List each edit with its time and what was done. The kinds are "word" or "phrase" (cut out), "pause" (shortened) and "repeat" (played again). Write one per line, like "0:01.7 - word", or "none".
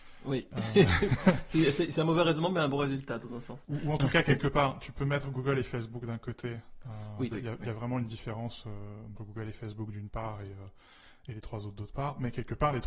0:07.3 - phrase
0:09.2 - phrase